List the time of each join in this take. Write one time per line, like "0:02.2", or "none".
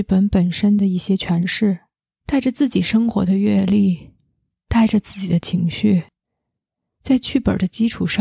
none